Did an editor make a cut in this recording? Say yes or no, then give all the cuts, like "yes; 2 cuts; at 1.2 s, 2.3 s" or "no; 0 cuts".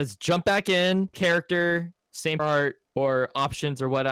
yes; 2 cuts; at 1.1 s, 2.4 s